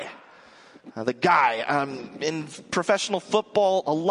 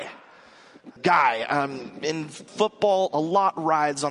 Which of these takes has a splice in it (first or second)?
second